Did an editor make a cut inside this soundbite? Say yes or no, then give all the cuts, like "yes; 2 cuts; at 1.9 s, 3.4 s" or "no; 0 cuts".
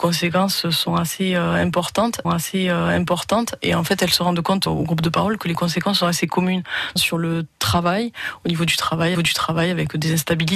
yes; 4 cuts; at 2.2 s, 4.7 s, 7.0 s, 9.1 s